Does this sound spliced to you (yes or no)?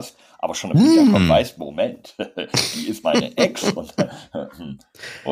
yes